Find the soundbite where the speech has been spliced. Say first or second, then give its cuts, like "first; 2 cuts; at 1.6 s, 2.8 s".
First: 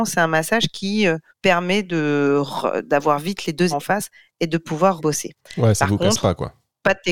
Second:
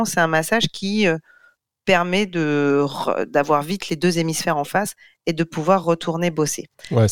first; 3 cuts; at 1.3 s, 3.7 s, 5.0 s